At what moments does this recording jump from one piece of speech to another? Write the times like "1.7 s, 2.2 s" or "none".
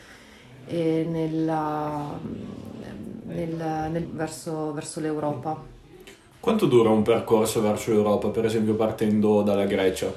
4.0 s